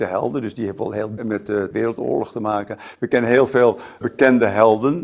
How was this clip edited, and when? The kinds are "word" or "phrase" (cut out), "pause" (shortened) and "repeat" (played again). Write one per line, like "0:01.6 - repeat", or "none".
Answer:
0:01.2 - word
0:01.7 - word
0:04.0 - word

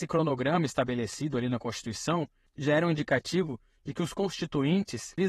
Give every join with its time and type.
none

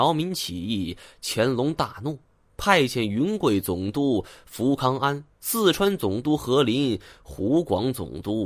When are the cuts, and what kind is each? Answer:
none

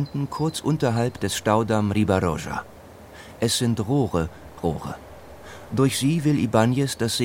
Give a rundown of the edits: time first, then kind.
0:04.6 - word

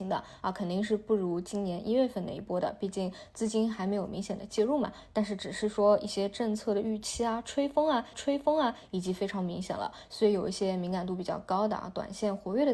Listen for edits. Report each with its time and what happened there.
0:08.1 - repeat

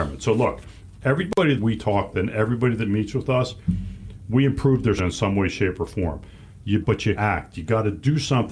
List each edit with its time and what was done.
0:01.6 - word
0:02.1 - word
0:05.0 - word
0:06.8 - word
0:07.1 - word

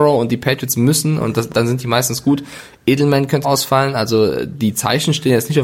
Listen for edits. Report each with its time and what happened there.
0:03.4 - word

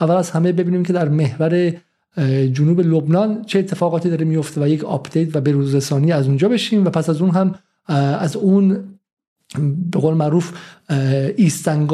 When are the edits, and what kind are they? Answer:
none

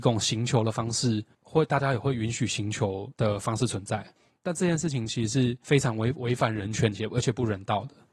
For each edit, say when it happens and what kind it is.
none

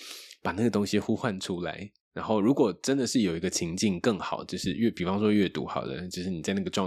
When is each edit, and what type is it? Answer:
0:02.0 - pause

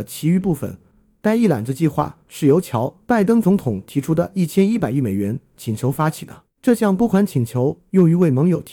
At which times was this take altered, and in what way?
0:06.5 - pause

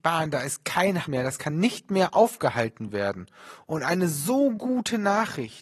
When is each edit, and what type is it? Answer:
0:01.0 - word

